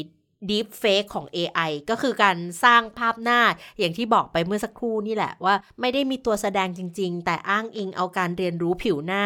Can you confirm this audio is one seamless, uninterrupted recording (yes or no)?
no